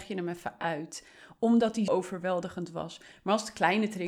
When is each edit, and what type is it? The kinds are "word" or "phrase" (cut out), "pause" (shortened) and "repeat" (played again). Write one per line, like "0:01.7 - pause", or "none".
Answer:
0:01.9 - word